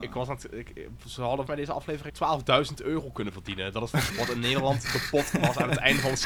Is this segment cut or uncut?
cut